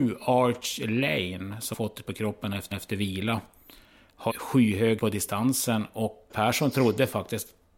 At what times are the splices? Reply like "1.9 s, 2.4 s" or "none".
1.7 s, 2.0 s, 2.7 s, 4.3 s, 5.0 s, 6.3 s